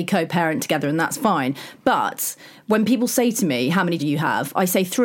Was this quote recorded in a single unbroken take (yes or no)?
no